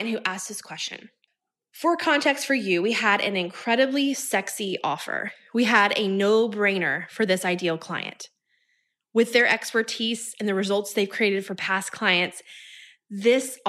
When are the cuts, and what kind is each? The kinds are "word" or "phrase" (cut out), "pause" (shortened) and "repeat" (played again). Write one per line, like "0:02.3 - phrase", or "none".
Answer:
none